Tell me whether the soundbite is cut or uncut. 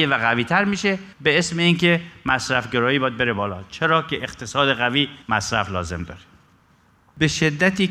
cut